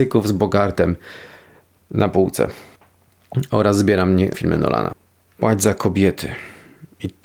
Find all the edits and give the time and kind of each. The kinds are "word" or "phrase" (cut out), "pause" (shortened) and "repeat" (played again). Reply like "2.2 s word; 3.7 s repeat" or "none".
4.3 s word